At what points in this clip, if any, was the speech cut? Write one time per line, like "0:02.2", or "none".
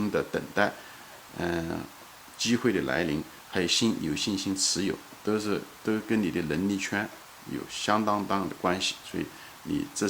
none